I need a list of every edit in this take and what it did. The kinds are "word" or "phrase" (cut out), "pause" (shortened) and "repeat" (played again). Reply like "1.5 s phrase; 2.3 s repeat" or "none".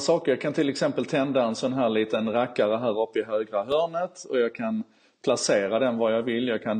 none